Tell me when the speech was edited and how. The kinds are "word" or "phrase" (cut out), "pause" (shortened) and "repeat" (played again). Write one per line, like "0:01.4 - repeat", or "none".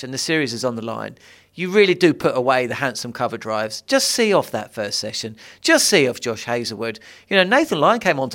none

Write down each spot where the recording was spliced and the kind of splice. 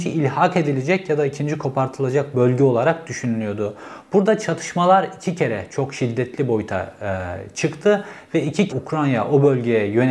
0:08.7 - word

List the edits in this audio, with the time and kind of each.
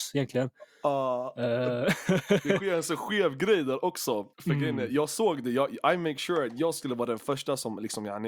0:04.3 - pause

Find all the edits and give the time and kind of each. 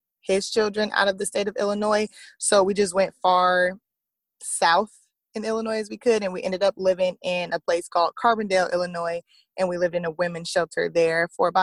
none

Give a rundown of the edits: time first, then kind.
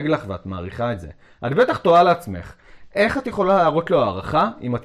none

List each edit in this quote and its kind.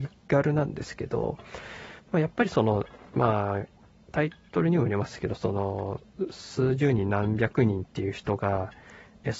none

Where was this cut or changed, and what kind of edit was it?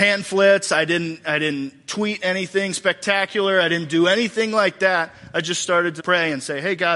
0:06.0 - word

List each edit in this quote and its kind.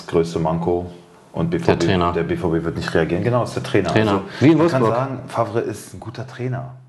none

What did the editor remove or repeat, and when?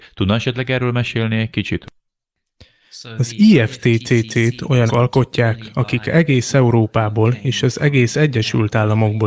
0:04.9 - word

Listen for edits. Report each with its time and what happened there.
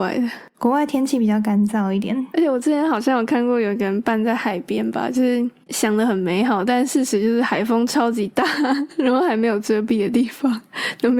none

